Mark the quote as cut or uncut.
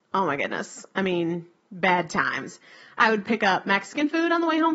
uncut